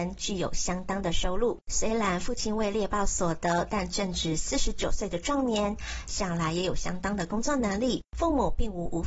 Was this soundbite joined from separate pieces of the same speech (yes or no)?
yes